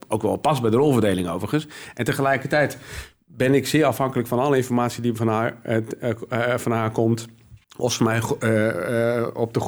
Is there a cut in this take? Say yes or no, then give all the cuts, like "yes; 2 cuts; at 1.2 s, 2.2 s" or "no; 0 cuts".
yes; 1 cut; at 7.6 s